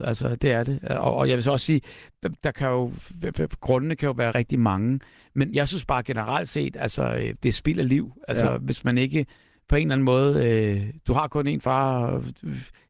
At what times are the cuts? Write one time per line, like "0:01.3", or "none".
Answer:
0:02.4
0:04.3
0:05.5
0:07.4